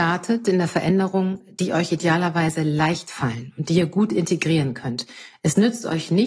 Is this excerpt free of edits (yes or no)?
yes